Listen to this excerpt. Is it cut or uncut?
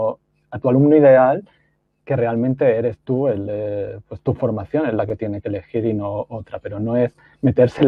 uncut